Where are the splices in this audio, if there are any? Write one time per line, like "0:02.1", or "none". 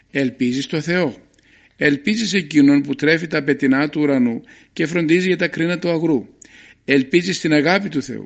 none